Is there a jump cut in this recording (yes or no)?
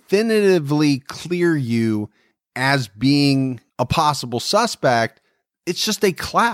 yes